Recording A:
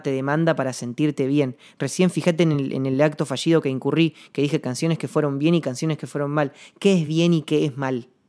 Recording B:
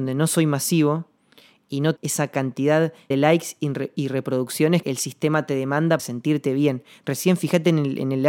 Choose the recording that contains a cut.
B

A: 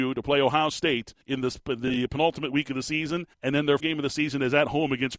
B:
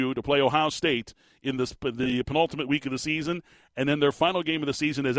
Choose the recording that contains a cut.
A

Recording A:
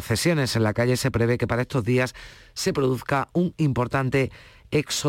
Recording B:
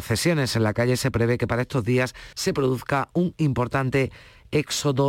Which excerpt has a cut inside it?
B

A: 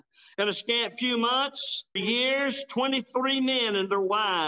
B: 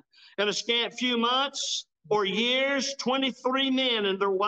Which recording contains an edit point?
A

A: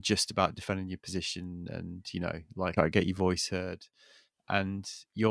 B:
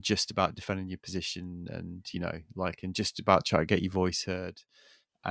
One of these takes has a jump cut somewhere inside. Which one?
A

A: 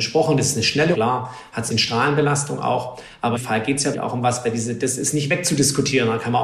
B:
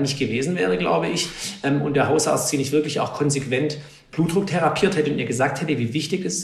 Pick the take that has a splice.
A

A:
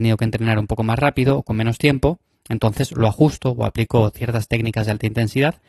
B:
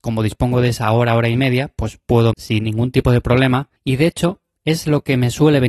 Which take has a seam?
B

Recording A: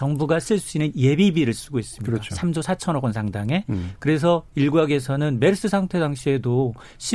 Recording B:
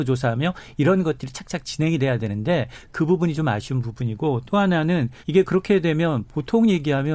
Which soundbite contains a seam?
B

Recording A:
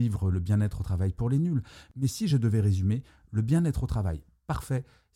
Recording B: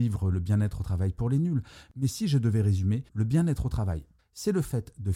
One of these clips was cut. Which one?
B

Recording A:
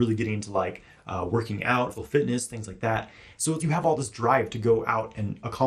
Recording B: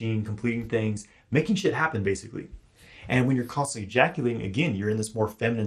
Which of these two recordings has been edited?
A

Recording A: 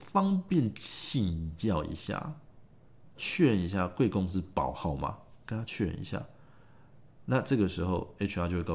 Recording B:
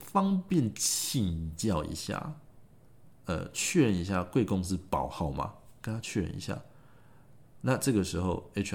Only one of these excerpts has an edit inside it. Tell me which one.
A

